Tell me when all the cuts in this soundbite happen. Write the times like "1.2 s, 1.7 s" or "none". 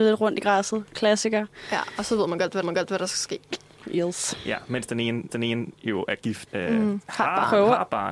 2.6 s, 5.3 s, 6.5 s, 7.1 s